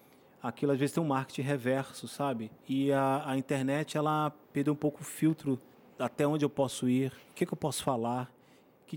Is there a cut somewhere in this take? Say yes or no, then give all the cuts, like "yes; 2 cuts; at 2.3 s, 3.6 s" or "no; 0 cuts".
yes; 3 cuts; at 4.4 s, 5.7 s, 7.2 s